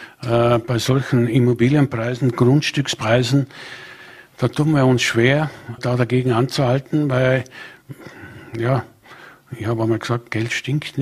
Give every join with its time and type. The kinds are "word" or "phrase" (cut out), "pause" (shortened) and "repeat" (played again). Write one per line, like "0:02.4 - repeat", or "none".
0:05.8 - word